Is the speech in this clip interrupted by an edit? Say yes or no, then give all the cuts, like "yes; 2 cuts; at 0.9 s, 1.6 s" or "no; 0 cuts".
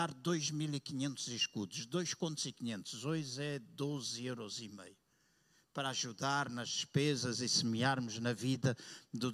no; 0 cuts